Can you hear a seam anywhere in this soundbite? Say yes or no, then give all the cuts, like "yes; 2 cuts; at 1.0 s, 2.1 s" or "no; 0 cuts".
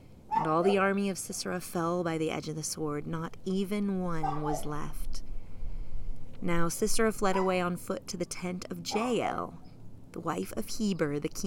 no; 0 cuts